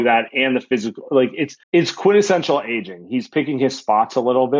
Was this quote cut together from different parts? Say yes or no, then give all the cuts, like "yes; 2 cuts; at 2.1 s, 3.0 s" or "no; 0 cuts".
yes; 1 cut; at 1.6 s